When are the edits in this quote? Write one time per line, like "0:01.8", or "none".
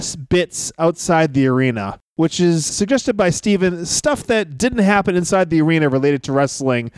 0:02.7